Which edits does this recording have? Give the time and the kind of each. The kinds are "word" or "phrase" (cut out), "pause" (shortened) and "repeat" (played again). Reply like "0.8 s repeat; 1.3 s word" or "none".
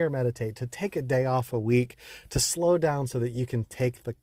none